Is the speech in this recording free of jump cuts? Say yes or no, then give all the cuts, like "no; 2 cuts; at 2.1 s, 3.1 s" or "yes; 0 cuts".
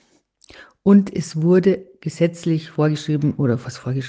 yes; 0 cuts